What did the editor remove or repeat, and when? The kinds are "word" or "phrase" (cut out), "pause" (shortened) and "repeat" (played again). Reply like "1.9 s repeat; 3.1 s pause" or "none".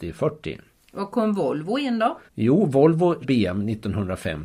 2.3 s pause; 3.2 s word